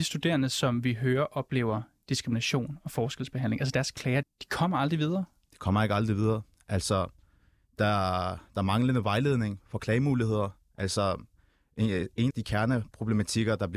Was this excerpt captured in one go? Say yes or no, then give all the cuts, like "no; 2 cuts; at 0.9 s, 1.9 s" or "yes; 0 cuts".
no; 2 cuts; at 4.2 s, 12.3 s